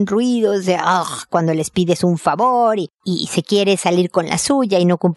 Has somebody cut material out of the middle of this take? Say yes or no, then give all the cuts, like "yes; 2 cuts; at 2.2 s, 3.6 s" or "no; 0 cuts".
no; 0 cuts